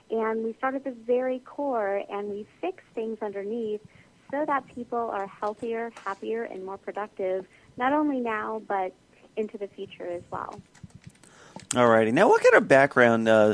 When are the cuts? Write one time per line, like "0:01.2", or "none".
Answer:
none